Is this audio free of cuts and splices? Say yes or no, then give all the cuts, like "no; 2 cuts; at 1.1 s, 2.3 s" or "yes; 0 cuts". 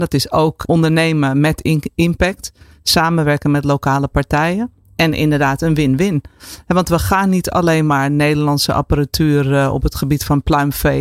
yes; 0 cuts